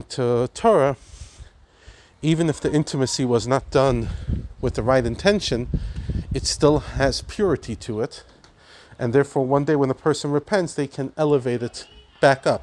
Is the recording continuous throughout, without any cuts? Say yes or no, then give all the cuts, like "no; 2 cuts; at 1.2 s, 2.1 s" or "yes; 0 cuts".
yes; 0 cuts